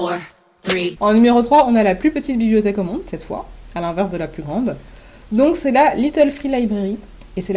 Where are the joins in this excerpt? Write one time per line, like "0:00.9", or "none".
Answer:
none

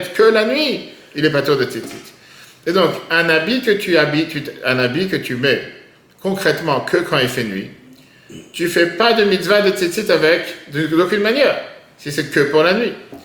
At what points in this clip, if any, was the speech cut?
none

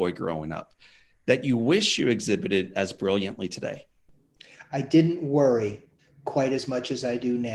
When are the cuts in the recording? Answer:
0:06.0

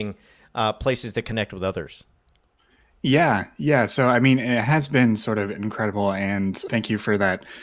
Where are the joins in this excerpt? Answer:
0:06.7

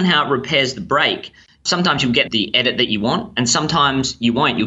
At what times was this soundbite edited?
none

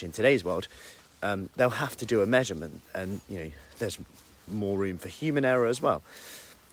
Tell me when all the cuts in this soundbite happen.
none

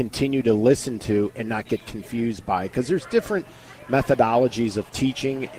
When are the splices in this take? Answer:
none

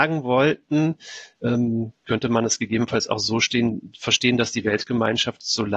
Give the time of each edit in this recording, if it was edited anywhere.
0:02.0

